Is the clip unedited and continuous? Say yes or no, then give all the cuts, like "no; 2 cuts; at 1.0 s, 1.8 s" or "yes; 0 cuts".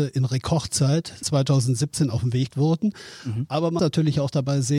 no; 3 cuts; at 1.2 s, 2.5 s, 3.8 s